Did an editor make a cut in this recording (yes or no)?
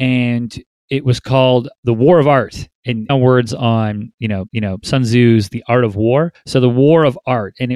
yes